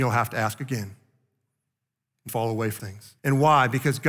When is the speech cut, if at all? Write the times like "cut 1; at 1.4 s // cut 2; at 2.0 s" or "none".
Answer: cut 1; at 2.3 s // cut 2; at 2.8 s // cut 3; at 3.2 s